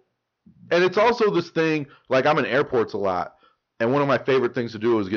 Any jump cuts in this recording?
no; 0 cuts

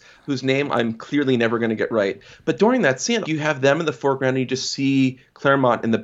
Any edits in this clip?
yes; 1 cut; at 3.2 s

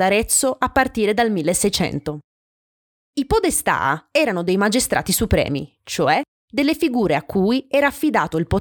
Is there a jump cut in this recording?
no; 0 cuts

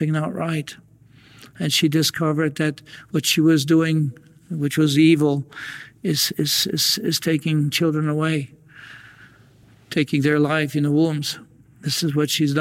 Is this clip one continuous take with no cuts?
yes; 0 cuts

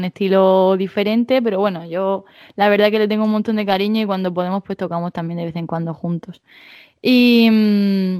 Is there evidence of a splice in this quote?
no; 0 cuts

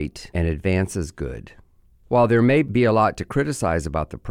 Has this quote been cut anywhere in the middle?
no; 0 cuts

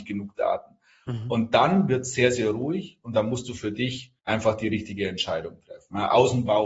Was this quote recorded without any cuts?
no; 1 cut; at 4.2 s

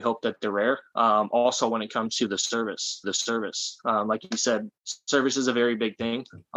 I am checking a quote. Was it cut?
yes; 2 cuts; at 3.0 s, 4.8 s

